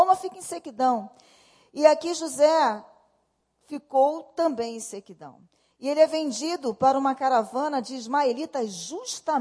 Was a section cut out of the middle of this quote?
no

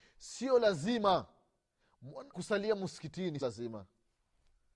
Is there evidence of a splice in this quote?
yes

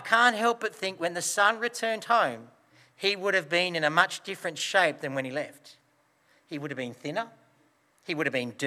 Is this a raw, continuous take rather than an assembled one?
yes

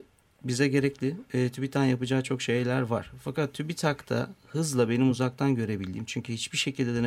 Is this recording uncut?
yes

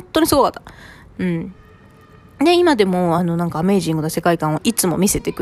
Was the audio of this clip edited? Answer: no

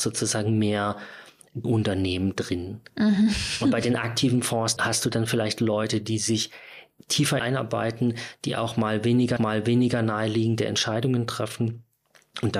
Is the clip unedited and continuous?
no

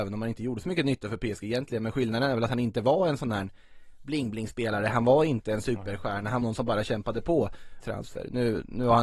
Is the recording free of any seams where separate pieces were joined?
no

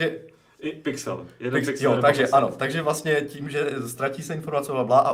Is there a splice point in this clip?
no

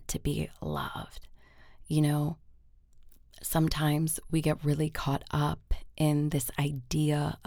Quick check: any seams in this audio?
no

